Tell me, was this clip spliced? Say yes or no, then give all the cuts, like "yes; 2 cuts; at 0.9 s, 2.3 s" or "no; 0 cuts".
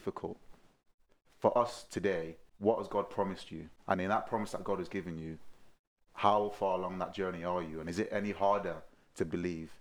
yes; 2 cuts; at 2.5 s, 3.8 s